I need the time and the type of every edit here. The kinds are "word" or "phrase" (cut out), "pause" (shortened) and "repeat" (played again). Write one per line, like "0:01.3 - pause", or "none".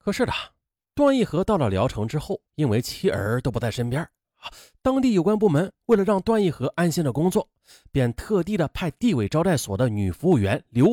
0:02.5 - pause